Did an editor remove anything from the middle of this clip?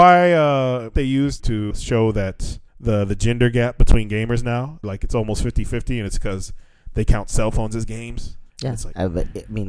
yes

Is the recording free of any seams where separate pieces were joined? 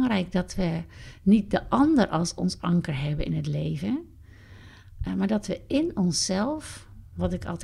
yes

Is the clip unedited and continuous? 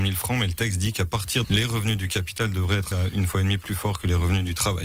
no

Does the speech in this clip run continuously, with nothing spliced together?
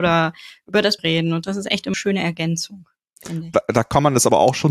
no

